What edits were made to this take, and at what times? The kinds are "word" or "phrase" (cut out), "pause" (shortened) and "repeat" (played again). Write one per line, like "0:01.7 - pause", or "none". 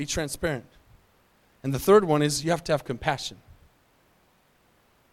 none

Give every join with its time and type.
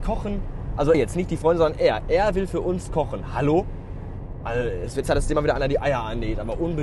0:00.9 - word
0:05.0 - word

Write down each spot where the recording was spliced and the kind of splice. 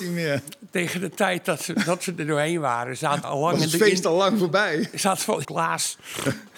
0:03.2 - word
0:05.4 - phrase

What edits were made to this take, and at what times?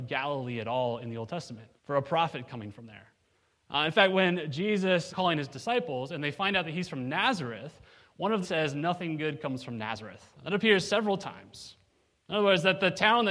0:01.8 - pause
0:05.1 - word
0:08.4 - word
0:10.3 - pause

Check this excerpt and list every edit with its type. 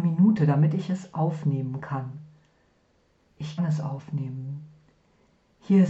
0:03.6 - word

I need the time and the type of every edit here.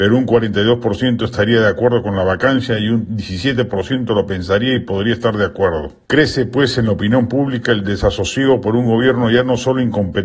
0:06.1 - pause

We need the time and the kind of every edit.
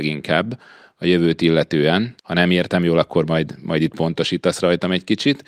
0:02.2 - pause

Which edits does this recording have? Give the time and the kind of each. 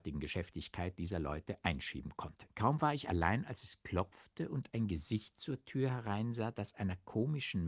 0:02.5 - pause

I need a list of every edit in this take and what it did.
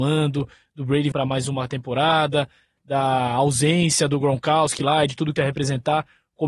0:01.1 - word
0:05.4 - word

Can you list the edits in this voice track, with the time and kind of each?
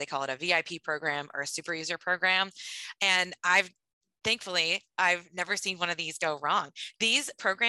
none

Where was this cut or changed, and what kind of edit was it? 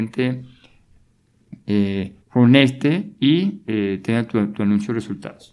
0:02.2 - pause

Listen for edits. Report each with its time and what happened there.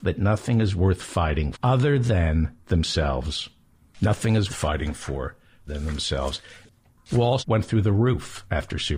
0:01.5 - word
0:04.5 - word
0:05.7 - word
0:07.4 - word

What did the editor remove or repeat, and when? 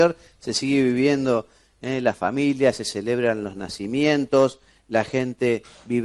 none

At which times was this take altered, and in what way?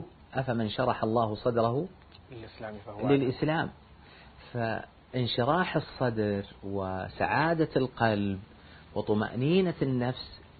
none

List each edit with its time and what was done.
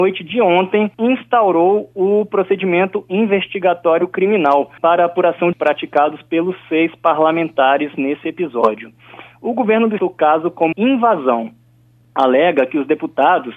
0:00.9 - pause
0:04.8 - pause
0:05.5 - phrase
0:10.0 - phrase
0:10.7 - word

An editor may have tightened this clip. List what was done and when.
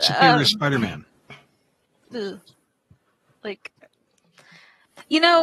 none

